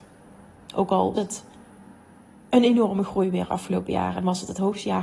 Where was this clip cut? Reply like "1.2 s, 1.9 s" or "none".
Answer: 1.2 s

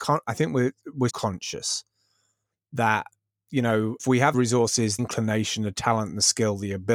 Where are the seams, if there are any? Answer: 1.1 s, 4.0 s, 4.3 s, 5.0 s

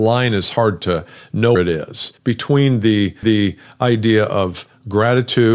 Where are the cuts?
1.6 s, 2.2 s, 3.2 s

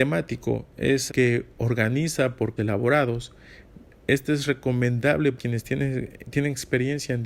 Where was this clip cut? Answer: 1.1 s, 2.6 s, 5.4 s

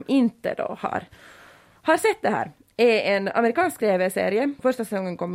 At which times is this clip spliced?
none

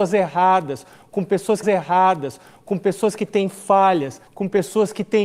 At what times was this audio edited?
1.6 s, 4.3 s

